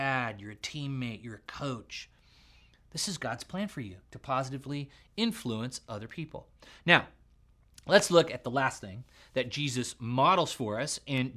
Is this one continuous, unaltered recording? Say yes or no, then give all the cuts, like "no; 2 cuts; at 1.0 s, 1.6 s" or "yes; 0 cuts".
yes; 0 cuts